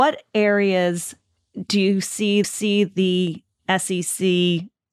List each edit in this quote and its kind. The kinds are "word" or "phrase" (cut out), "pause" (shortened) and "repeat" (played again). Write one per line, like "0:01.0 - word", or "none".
0:02.4 - repeat

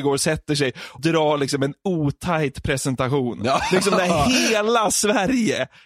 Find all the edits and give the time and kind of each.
0:01.0 - word

